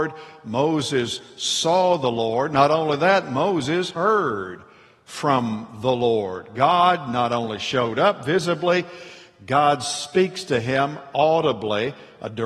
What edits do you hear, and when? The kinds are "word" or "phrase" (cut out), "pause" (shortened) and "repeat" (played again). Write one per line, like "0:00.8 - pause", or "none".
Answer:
none

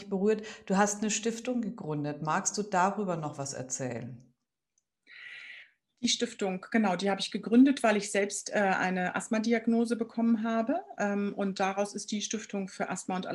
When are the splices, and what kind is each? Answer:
none

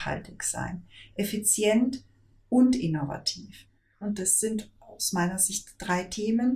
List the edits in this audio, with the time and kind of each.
none

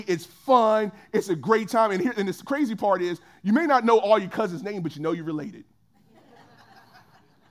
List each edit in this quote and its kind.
none

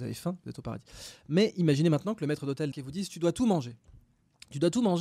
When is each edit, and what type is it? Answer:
0:02.7 - word

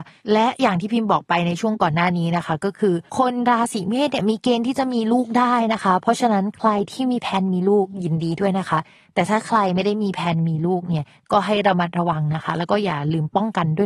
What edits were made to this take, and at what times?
0:03.1 - pause

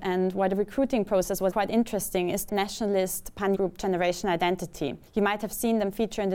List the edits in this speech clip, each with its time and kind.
0:01.5 - word
0:02.5 - word
0:03.5 - word
0:05.1 - pause

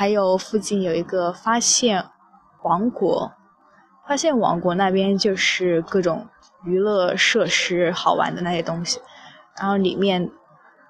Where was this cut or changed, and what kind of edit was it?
none

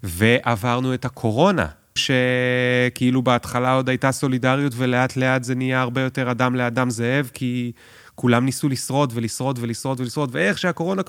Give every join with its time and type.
0:02.0 - word

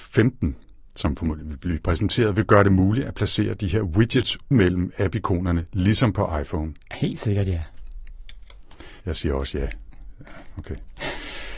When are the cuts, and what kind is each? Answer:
0:04.5 - word
0:06.8 - pause
0:09.0 - pause

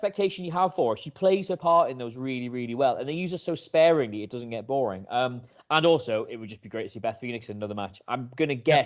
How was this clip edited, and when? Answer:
none

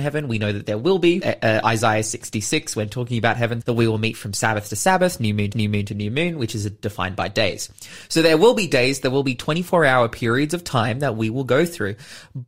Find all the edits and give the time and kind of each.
0:01.2 - word
0:03.6 - word
0:05.5 - repeat

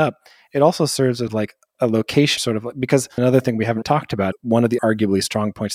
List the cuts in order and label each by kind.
0:01.3 - word
0:01.7 - word
0:02.4 - word
0:03.2 - word
0:03.8 - word
0:04.3 - word
0:04.8 - word

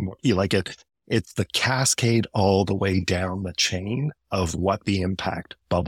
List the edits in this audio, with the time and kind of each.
none

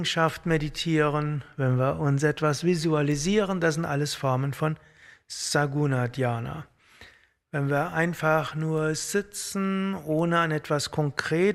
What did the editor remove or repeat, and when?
none

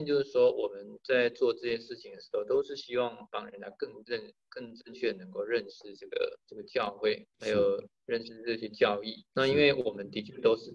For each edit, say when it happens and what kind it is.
0:06.4 - pause
0:07.3 - pause
0:09.3 - pause

